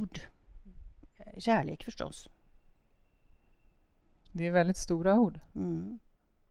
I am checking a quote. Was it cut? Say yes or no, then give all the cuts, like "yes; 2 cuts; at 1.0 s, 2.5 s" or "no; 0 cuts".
no; 0 cuts